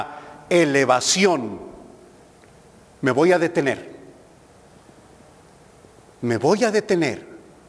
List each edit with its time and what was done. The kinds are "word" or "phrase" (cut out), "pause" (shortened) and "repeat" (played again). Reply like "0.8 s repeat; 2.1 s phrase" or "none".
none

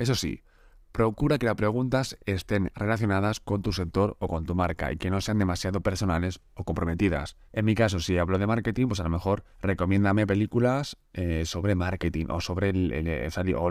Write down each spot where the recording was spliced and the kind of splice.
7.5 s pause; 9.5 s pause

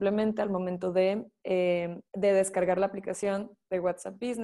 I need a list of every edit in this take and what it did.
2.1 s pause

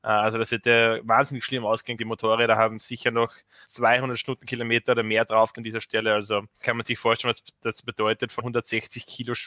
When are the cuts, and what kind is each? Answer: 2.0 s word; 3.6 s word; 5.5 s word; 6.6 s word; 8.4 s word

